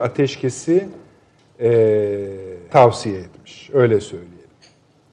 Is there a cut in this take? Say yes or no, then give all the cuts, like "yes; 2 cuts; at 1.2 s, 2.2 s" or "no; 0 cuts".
yes; 1 cut; at 2.7 s